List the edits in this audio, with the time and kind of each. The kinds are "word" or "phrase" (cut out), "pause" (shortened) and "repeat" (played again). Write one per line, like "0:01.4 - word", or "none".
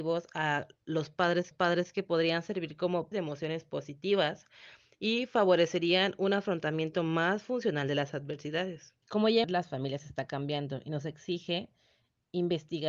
0:01.5 - repeat
0:03.1 - word
0:09.0 - pause
0:09.4 - phrase